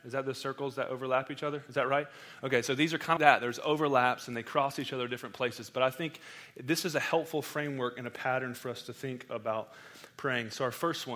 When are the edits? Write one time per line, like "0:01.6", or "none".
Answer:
0:03.2